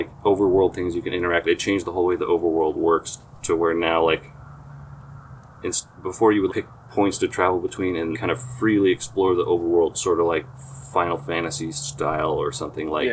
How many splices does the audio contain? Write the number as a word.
three